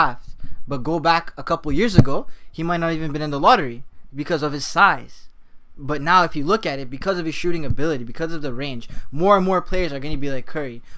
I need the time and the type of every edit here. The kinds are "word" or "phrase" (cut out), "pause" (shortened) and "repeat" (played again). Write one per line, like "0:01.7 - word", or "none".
none